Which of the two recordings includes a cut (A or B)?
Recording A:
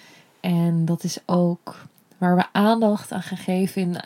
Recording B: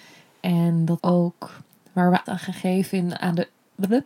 B